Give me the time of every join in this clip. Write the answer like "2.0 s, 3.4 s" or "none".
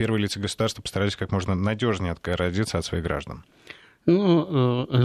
none